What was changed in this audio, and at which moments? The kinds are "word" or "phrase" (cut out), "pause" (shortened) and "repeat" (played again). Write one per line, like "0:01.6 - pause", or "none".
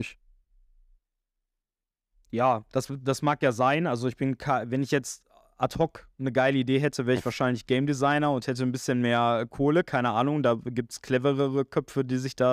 none